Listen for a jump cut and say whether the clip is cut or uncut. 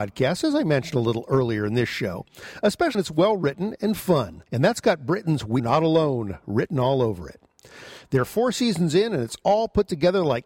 cut